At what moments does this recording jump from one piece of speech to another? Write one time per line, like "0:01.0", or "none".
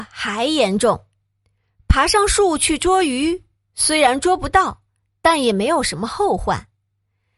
none